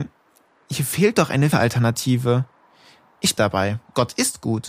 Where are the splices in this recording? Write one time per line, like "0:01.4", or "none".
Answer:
0:01.5
0:03.4